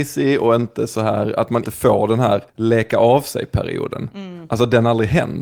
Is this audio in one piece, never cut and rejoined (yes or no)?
no